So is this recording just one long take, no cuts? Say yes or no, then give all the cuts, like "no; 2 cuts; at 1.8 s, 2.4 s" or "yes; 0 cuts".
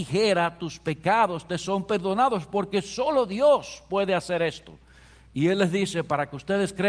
yes; 0 cuts